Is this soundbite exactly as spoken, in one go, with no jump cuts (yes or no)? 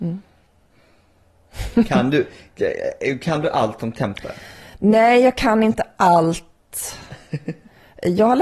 yes